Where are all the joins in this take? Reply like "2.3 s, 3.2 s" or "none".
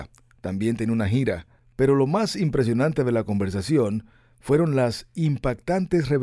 none